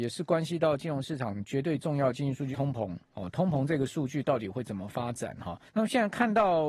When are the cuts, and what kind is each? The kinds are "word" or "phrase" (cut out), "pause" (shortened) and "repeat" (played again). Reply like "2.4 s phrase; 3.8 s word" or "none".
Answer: 2.5 s phrase; 5.7 s pause

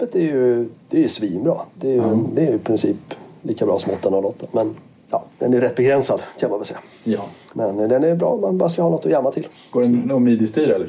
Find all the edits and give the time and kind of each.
none

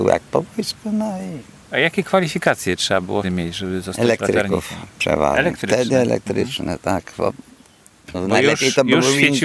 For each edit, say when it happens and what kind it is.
1.6 s pause; 3.2 s word; 8.1 s word

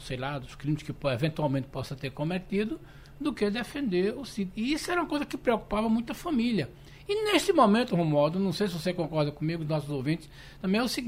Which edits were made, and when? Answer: none

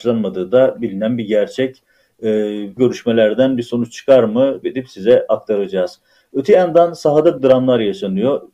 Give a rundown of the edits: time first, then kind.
2.8 s word; 4.6 s word; 7.4 s word

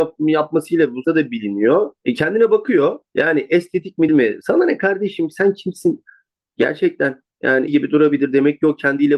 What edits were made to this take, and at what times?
1.0 s phrase; 2.0 s pause; 3.1 s pause; 4.1 s word; 7.7 s word

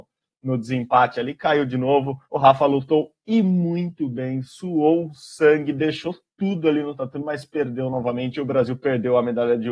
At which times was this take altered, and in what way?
2.2 s pause

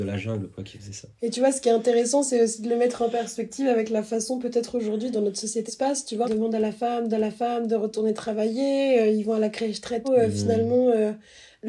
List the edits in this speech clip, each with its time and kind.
5.1 s word; 5.7 s word; 6.2 s word; 7.1 s repeat; 10.0 s word

